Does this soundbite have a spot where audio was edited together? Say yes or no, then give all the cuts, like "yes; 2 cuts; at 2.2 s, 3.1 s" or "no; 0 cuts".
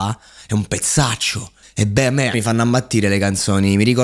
yes; 2 cuts; at 1.6 s, 2.3 s